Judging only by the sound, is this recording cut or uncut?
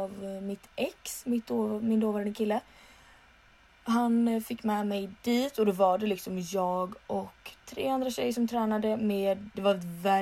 uncut